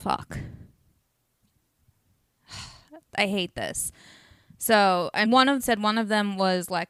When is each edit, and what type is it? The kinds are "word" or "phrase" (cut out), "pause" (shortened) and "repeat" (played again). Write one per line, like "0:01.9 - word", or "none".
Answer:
0:05.2 - word
0:05.6 - phrase